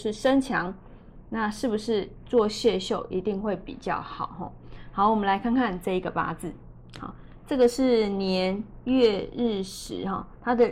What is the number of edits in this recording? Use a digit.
0